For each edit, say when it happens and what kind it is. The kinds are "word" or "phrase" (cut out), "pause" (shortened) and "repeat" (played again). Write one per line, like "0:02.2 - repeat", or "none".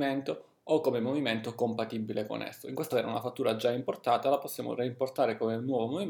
0:02.9 - word